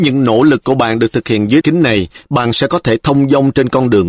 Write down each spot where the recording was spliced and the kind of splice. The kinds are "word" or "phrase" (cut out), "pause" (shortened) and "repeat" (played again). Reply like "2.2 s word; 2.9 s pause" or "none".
1.6 s word